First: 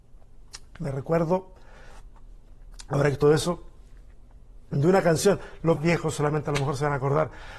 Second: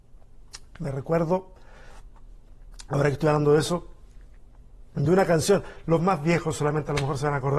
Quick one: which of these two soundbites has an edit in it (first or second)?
first